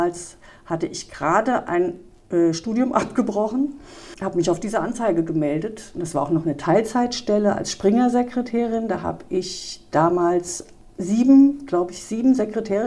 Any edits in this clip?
no; 0 cuts

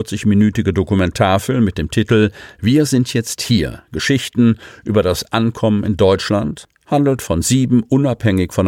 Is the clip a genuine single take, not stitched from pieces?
yes; 0 cuts

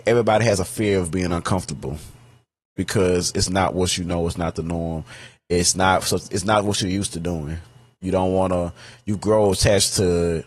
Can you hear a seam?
no; 0 cuts

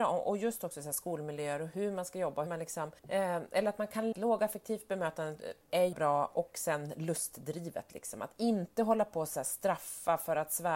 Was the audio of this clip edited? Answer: yes; 4 cuts; at 2.5 s, 3.0 s, 4.1 s, 5.9 s

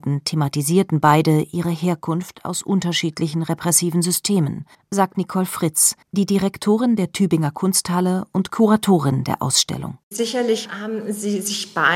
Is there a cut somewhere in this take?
yes; 3 cuts; at 4.7 s, 6.0 s, 10.0 s

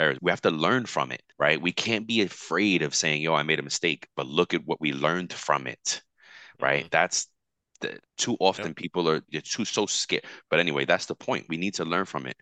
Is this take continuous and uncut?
no; 2 cuts; at 1.3 s, 8.1 s

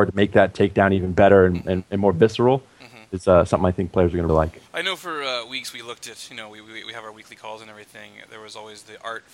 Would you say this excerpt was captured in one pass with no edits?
no; 2 cuts; at 4.3 s, 4.7 s

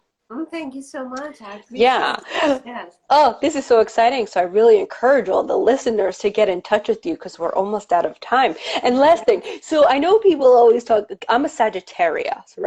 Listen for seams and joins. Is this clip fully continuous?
yes; 0 cuts

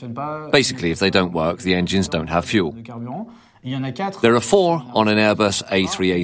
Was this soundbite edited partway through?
no; 0 cuts

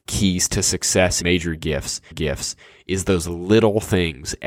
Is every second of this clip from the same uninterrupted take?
no; 2 cuts; at 1.2 s, 2.1 s

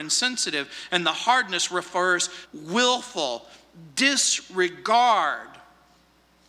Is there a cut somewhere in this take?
yes; 1 cut; at 2.5 s

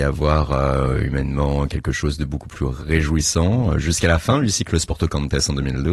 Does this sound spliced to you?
no; 0 cuts

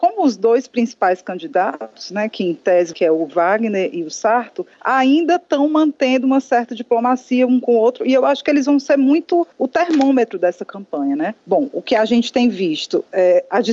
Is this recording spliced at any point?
yes; 3 cuts; at 2.9 s, 9.5 s, 11.4 s

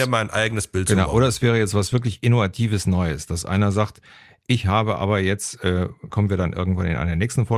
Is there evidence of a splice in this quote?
yes; 1 cut; at 6.1 s

